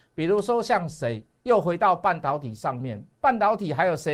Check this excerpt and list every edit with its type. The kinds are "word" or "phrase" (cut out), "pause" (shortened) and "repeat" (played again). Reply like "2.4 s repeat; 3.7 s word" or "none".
none